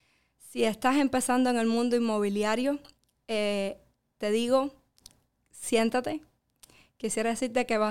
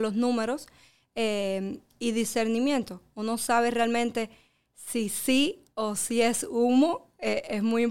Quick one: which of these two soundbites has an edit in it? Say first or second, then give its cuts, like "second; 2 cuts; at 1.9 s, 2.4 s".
second; 1 cut; at 1.9 s